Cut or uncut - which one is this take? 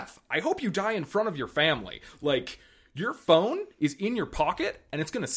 uncut